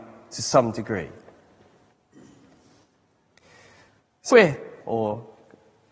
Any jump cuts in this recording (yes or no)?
yes